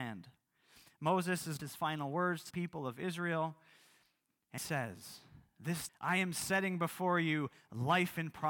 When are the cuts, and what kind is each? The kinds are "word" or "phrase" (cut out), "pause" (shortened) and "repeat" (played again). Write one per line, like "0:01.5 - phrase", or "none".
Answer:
0:01.6 - phrase
0:02.5 - word
0:04.6 - word
0:05.9 - word